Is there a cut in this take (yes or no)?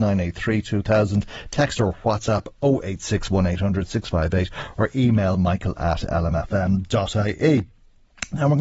no